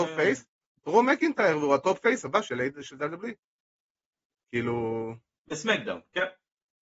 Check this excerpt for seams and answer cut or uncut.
uncut